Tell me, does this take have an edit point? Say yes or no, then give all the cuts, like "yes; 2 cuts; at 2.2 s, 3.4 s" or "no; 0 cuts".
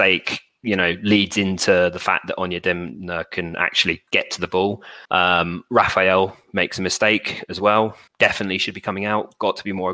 yes; 3 cuts; at 4.1 s, 5.0 s, 8.1 s